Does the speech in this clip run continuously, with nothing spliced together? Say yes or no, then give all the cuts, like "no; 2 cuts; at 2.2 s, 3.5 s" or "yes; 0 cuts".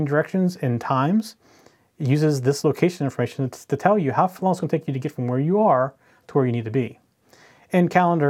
yes; 0 cuts